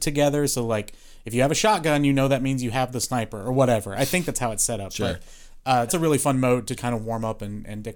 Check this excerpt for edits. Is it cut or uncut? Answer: cut